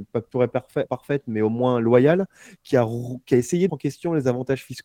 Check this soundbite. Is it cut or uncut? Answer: cut